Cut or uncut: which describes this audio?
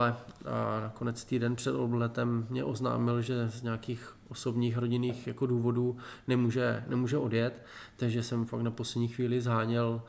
uncut